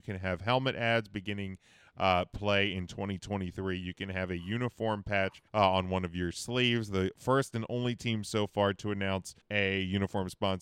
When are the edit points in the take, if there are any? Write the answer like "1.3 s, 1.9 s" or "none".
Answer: 5.5 s, 9.4 s